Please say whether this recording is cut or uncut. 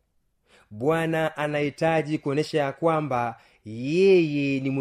uncut